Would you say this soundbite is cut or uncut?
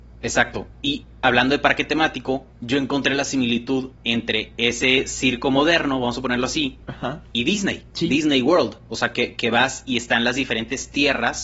cut